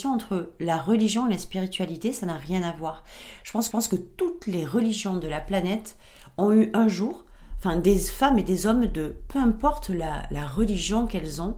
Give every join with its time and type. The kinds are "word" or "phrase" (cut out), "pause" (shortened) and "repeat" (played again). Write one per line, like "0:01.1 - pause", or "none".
0:03.7 - repeat